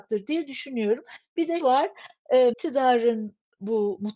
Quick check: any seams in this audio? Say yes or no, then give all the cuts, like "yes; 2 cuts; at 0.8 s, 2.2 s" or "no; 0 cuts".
yes; 2 cuts; at 1.6 s, 2.5 s